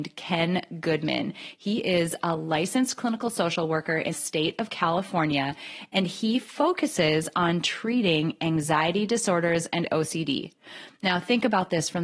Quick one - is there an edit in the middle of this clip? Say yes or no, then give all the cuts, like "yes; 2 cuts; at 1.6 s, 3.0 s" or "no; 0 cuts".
yes; 1 cut; at 4.1 s